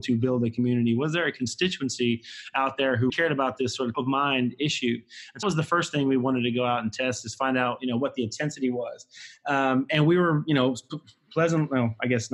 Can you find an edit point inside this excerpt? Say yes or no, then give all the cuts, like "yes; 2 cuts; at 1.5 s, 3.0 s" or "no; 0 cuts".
yes; 3 cuts; at 3.1 s, 3.9 s, 5.4 s